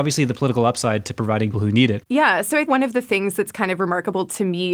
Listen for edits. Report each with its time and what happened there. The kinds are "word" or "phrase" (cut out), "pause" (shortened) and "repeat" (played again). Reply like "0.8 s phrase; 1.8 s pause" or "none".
1.5 s phrase; 2.7 s word